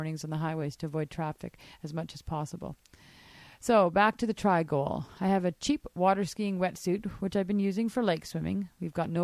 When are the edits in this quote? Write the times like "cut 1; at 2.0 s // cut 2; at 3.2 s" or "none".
none